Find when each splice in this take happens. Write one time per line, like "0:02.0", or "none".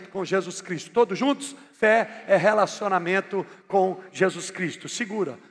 0:01.7